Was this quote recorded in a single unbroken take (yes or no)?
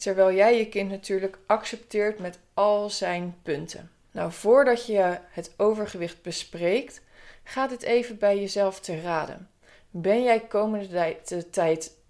yes